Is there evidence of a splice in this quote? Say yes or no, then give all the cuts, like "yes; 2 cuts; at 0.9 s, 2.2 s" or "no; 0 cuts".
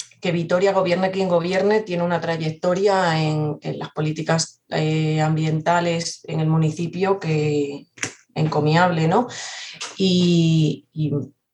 no; 0 cuts